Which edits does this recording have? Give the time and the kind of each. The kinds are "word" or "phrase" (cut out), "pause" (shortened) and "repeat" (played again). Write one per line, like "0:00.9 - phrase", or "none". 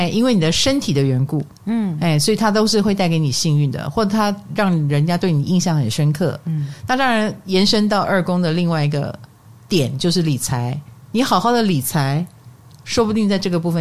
none